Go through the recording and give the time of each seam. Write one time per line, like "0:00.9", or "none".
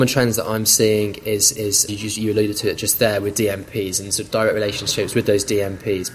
0:01.9